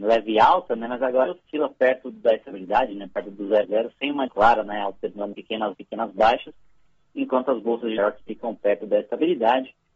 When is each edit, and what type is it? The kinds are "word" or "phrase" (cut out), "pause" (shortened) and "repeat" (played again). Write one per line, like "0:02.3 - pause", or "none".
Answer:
0:01.3 - word
0:03.6 - word
0:04.3 - word
0:05.3 - word
0:05.7 - word
0:08.0 - word